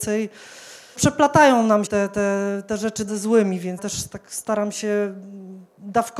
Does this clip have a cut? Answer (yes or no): yes